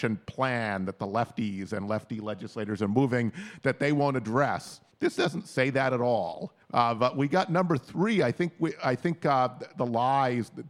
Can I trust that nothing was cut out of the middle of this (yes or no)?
no